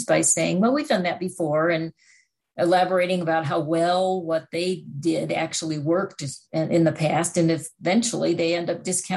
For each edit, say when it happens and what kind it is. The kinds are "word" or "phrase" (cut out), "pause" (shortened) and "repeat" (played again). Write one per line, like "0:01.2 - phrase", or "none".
none